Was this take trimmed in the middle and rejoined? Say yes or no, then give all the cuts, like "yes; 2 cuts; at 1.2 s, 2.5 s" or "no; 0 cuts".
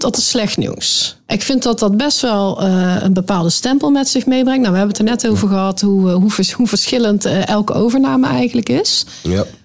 no; 0 cuts